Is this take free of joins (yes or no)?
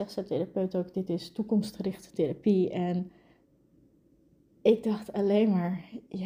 yes